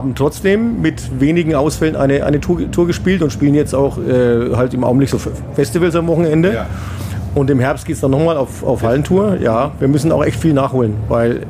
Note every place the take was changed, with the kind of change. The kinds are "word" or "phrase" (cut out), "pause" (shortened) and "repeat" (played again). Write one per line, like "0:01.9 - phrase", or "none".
none